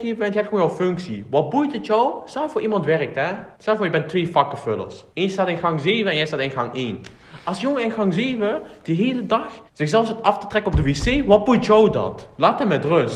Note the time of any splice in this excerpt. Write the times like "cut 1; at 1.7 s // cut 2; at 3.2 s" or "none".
cut 1; at 3.5 s // cut 2; at 5.1 s // cut 3; at 9.7 s